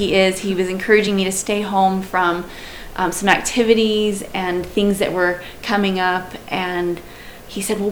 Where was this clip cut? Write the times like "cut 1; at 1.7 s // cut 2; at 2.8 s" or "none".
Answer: none